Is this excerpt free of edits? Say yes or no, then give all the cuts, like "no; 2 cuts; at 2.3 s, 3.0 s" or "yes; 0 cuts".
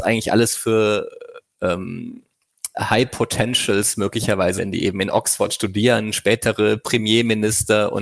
no; 2 cuts; at 2.7 s, 4.6 s